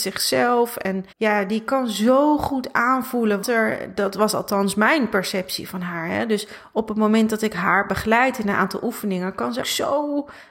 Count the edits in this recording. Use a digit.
3